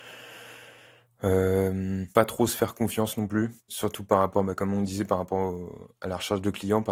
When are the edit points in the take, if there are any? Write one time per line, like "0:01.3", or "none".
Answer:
0:02.1
0:03.6